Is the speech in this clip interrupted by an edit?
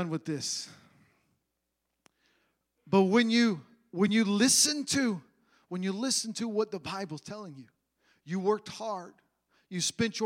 no; 0 cuts

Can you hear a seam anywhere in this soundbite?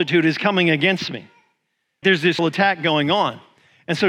yes; 2 cuts; at 2.0 s, 2.4 s

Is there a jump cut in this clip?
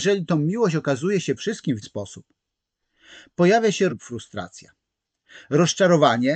yes; 3 cuts; at 1.4 s, 1.8 s, 3.9 s

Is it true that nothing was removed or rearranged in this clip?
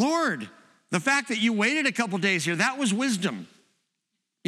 yes; 0 cuts

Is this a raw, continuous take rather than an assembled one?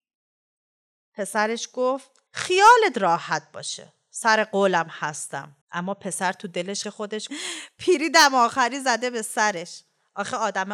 no; 4 cuts; at 2.3 s, 5.6 s, 6.8 s, 7.3 s

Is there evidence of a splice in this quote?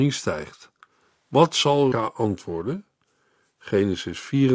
yes; 1 cut; at 1.9 s

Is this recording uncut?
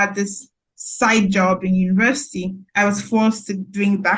no; 1 cut; at 2.7 s

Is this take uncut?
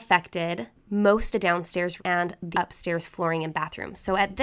no; 3 cuts; at 1.3 s, 2.0 s, 2.5 s

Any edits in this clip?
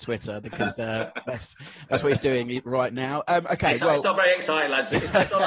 no; 0 cuts

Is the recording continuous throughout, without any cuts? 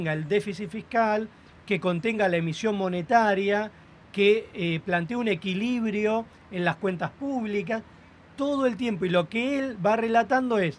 yes; 0 cuts

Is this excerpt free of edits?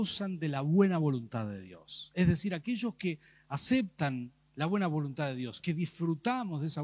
yes; 0 cuts

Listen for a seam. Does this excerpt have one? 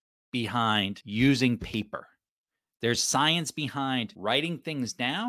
no; 0 cuts

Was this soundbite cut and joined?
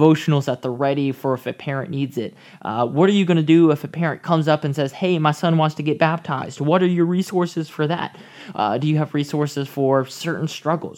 no; 0 cuts

